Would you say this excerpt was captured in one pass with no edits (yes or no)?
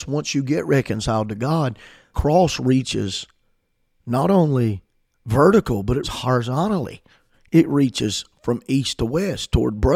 no